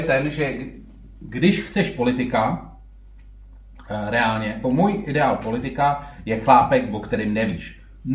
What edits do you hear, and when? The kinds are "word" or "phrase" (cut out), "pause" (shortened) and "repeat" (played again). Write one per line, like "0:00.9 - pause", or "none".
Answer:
0:04.6 - word